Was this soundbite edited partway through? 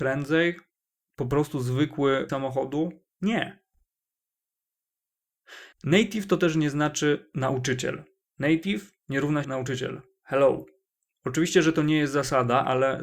yes; 4 cuts; at 2.3 s, 5.7 s, 9.4 s, 10.9 s

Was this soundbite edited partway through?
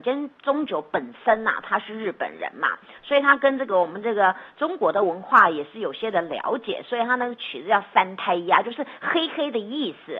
no; 0 cuts

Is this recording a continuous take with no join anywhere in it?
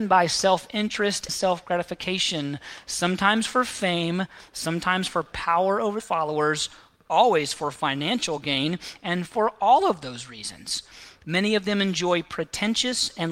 no; 3 cuts; at 1.3 s, 6.0 s, 9.2 s

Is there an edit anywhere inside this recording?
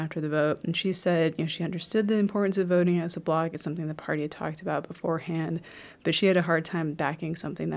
no; 0 cuts

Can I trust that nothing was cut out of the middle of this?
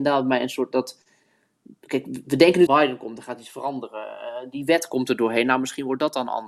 no; 2 cuts; at 1.8 s, 2.7 s

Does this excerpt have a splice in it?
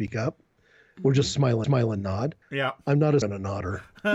yes; 3 cuts; at 1.6 s, 2.4 s, 3.2 s

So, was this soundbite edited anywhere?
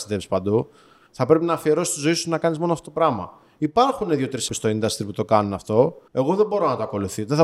yes; 2 cuts; at 4.5 s, 6.1 s

